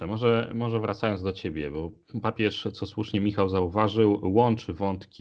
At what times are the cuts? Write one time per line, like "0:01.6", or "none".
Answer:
none